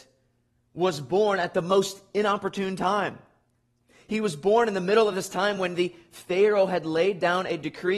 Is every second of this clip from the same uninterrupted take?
yes; 0 cuts

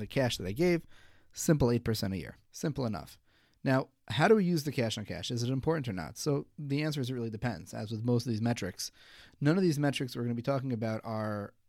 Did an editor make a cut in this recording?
yes; 1 cut; at 2.5 s

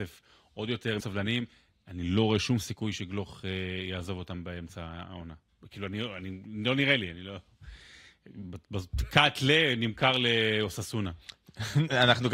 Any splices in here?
yes; 1 cut; at 1.0 s

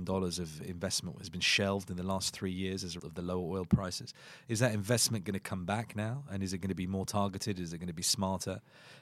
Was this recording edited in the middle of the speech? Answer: yes; 1 cut; at 3.0 s

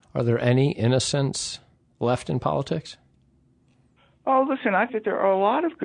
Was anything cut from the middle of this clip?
yes; 1 cut; at 4.9 s

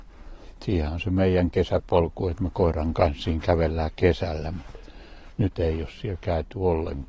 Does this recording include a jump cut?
no; 0 cuts

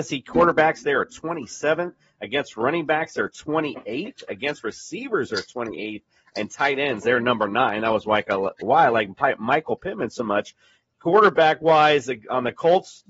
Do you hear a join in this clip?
no; 0 cuts

